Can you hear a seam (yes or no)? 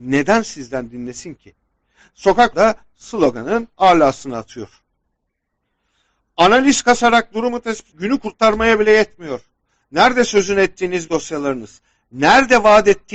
yes